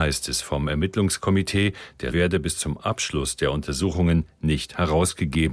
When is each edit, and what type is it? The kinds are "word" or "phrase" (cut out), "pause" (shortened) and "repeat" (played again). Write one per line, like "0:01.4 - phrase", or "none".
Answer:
0:02.1 - word